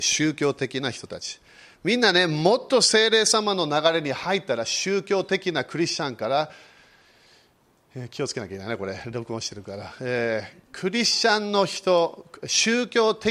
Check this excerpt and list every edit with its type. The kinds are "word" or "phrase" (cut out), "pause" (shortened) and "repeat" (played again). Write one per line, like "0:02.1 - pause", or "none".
none

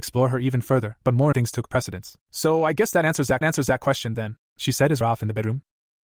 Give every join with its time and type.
0:01.0 - pause
0:01.3 - word
0:02.2 - pause
0:03.4 - repeat
0:04.5 - pause
0:05.0 - phrase

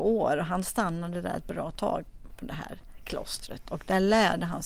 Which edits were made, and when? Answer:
none

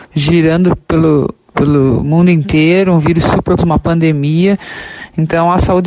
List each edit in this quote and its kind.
0:03.6 - word

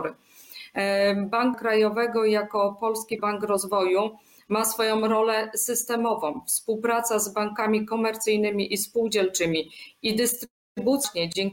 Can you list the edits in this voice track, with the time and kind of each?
0:01.5 - word
0:03.2 - word

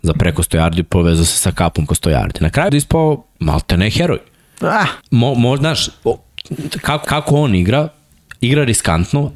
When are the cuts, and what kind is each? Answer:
0:01.9 - word
0:02.7 - phrase
0:03.3 - pause
0:05.0 - pause
0:07.0 - repeat
0:08.4 - pause

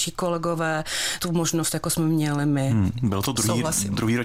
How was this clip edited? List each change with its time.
0:01.2 - phrase

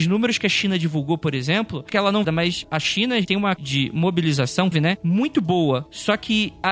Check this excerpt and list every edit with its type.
0:01.9 - word
0:02.2 - phrase
0:02.6 - word
0:03.6 - word
0:04.7 - word

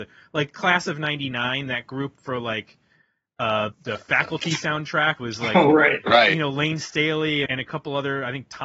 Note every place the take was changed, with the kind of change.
0:03.7 - word
0:05.2 - word
0:07.5 - word

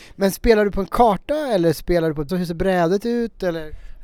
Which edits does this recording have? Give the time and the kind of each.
0:02.3 - phrase

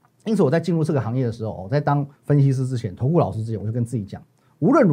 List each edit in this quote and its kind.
0:02.2 - pause

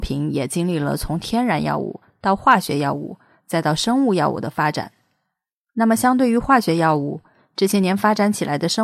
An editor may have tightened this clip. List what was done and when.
none

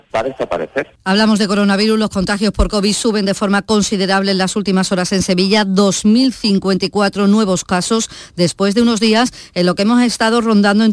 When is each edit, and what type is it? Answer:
0:01.0 - pause

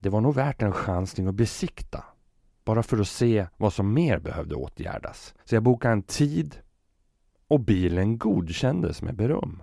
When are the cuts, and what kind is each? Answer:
0:05.4 - pause

